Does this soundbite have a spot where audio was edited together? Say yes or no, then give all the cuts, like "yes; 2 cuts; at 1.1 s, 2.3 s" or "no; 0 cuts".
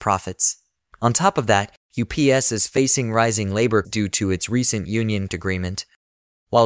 yes; 2 cuts; at 3.8 s, 5.3 s